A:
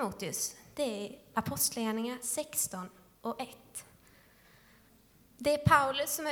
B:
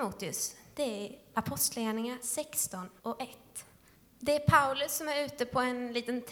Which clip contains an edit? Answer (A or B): B